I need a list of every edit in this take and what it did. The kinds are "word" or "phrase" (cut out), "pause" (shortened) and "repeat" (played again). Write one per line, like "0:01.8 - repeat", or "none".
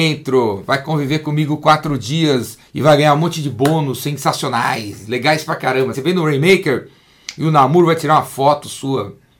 0:02.7 - pause
0:05.9 - word